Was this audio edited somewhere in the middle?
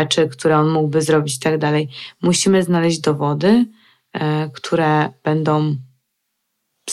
no; 0 cuts

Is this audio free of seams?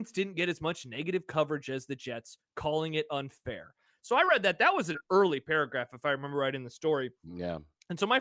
yes; 0 cuts

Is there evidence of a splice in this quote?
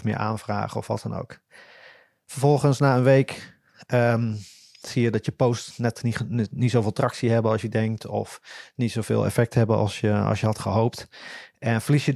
no; 0 cuts

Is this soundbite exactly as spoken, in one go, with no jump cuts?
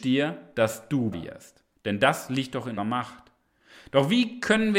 no; 2 cuts; at 1.1 s, 2.8 s

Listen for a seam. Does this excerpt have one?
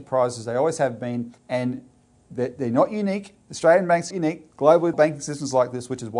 yes; 3 cuts; at 1.4 s, 4.1 s, 4.9 s

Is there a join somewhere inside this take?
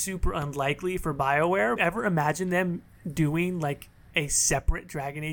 yes; 1 cut; at 1.8 s

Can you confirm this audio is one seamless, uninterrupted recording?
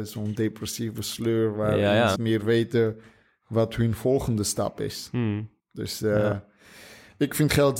no; 2 cuts; at 2.2 s, 5.6 s

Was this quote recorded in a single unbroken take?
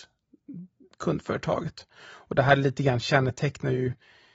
yes; 0 cuts

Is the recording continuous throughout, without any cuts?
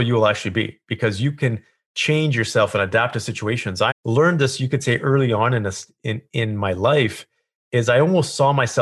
no; 1 cut; at 3.9 s

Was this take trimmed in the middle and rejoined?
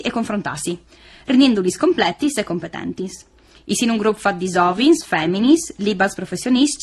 no; 0 cuts

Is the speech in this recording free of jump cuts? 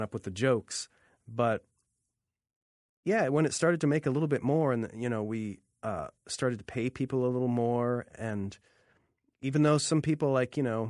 yes; 0 cuts

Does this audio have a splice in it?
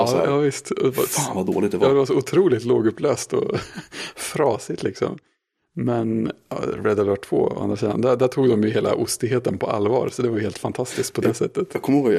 no; 0 cuts

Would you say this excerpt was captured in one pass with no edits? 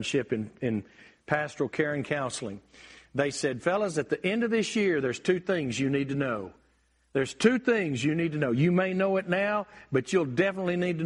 yes; 0 cuts

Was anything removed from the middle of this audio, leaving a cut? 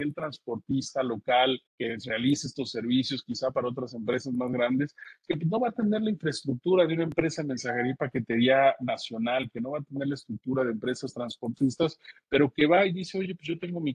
yes; 1 cut; at 1.7 s

